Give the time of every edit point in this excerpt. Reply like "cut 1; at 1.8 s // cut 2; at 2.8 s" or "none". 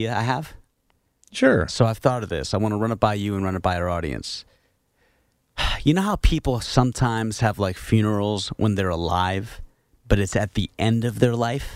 none